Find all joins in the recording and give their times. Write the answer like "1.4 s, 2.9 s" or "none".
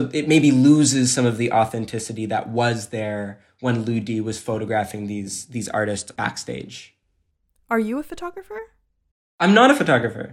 none